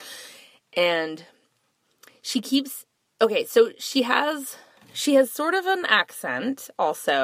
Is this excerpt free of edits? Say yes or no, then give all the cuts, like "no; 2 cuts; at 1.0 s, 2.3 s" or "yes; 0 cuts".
yes; 0 cuts